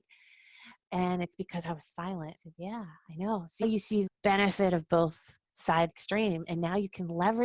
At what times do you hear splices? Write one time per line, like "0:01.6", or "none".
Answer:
0:02.3
0:03.6
0:04.1
0:05.9